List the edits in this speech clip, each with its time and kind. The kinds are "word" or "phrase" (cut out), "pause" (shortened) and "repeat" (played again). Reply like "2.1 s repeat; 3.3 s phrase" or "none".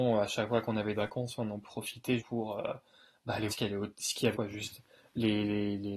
0.9 s word; 2.2 s word; 3.5 s word; 4.3 s word

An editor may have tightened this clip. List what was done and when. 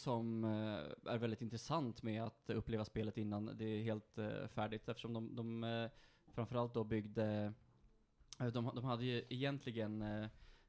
none

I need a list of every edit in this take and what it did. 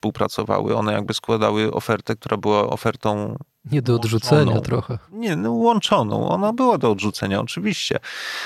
none

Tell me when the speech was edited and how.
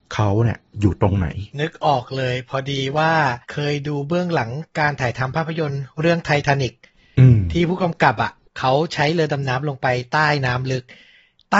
1.5 s pause; 3.4 s pause

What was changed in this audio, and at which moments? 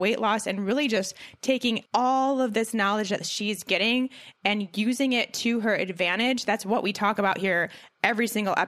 1.9 s pause

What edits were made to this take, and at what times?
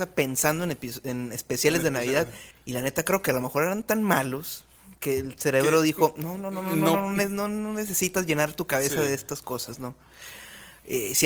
2.5 s pause

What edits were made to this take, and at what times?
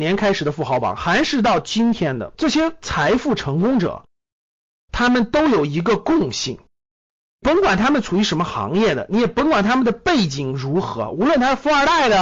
none

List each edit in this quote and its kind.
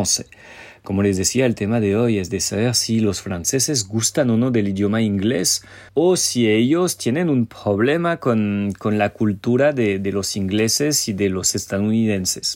5.9 s pause

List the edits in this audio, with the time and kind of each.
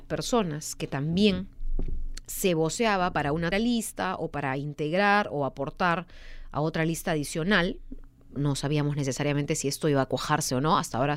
3.5 s word; 8.4 s word

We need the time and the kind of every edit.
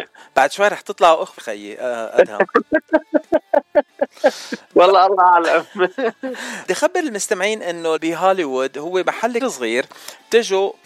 1.4 s word; 4.7 s word; 6.7 s word; 8.0 s word; 9.4 s word

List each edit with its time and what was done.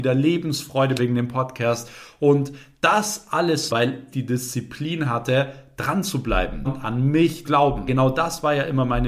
1.0 s word; 3.7 s word; 4.1 s word; 6.6 s word; 7.4 s word; 7.9 s word

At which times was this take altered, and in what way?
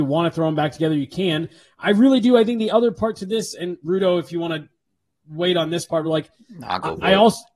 none

